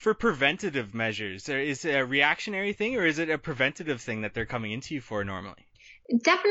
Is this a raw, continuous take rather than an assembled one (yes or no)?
no